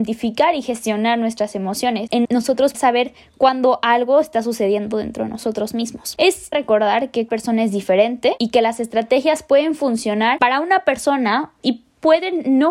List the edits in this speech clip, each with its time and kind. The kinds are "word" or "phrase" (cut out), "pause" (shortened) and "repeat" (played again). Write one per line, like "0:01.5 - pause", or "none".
0:02.2 - word
0:02.7 - word
0:06.5 - word
0:07.3 - word